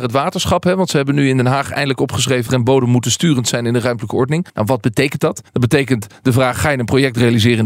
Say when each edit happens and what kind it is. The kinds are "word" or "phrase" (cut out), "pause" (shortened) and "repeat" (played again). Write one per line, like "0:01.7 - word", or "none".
0:02.5 - word
0:04.5 - pause
0:05.5 - pause